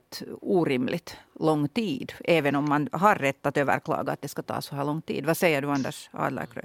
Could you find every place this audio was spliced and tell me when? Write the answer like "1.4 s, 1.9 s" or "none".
none